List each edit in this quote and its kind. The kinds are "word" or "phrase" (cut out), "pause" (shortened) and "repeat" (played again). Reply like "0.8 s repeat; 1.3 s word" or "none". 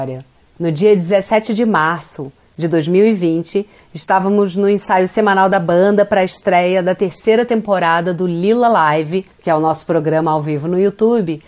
9.3 s pause